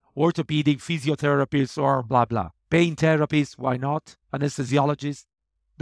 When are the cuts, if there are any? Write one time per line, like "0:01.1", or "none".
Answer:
0:02.6
0:04.2